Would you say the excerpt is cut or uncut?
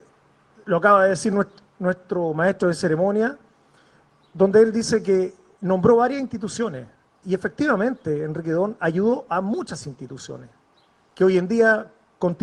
cut